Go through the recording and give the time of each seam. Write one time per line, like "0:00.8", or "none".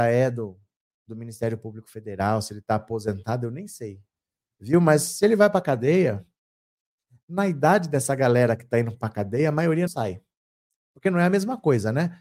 0:09.9